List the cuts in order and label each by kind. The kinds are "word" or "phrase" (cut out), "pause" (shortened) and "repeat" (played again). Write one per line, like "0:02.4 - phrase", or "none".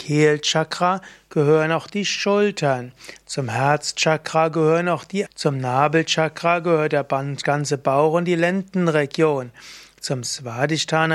0:05.3 - word